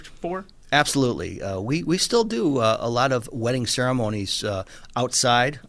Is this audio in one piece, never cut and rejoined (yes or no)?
yes